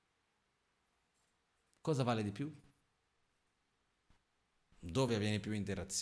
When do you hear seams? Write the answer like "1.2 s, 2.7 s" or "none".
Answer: none

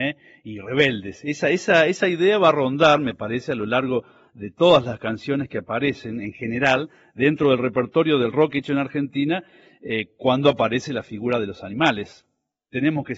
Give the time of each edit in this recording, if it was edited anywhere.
none

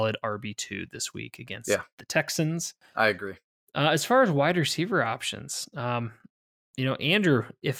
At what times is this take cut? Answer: none

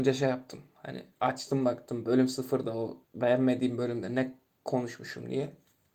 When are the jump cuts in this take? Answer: 1.1 s, 3.0 s

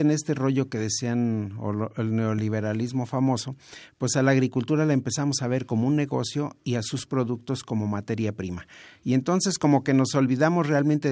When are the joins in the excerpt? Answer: none

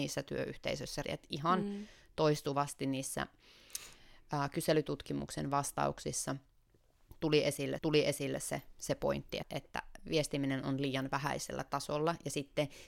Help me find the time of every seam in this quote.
1.0 s, 7.8 s, 9.4 s

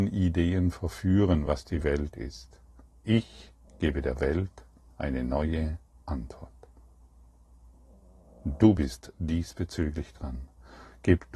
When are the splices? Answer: none

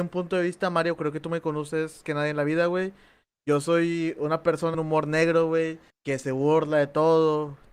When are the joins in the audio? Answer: 2.0 s, 4.7 s, 5.9 s

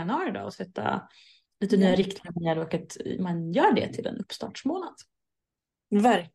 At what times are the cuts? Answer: none

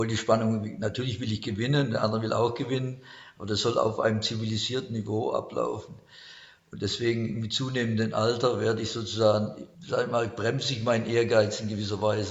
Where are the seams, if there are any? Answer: 9.7 s

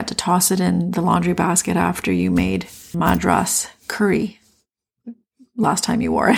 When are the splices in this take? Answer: 2.9 s

